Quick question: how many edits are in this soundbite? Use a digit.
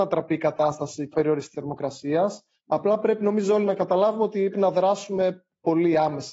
3